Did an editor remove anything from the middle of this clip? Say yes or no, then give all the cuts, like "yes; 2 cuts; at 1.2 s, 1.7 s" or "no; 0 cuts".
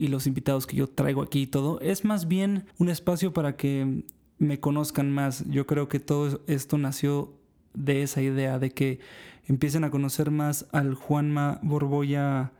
yes; 2 cuts; at 0.9 s, 2.7 s